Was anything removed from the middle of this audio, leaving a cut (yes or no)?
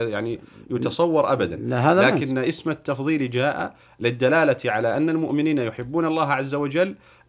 no